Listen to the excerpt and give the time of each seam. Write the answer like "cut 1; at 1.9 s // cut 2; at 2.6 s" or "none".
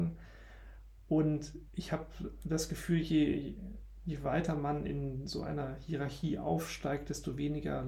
none